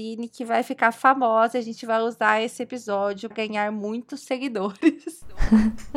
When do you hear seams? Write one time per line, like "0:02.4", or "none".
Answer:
0:03.3